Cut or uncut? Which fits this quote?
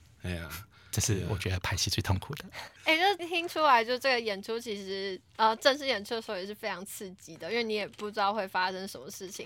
cut